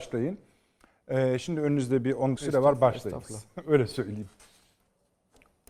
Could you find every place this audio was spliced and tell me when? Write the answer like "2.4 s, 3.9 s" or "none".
2.4 s